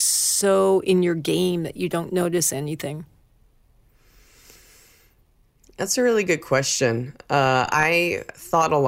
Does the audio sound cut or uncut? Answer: uncut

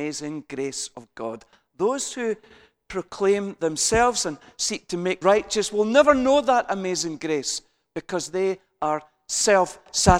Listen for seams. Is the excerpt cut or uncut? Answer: cut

